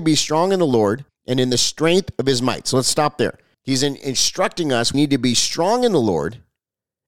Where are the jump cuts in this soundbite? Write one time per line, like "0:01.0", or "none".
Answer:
0:01.1
0:03.5
0:04.9